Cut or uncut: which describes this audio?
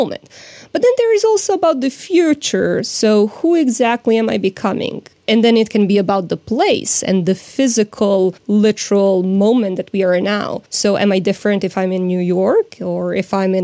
cut